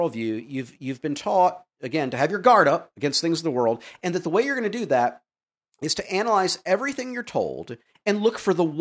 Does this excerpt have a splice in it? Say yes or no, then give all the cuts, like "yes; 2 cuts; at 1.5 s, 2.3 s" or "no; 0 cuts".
no; 0 cuts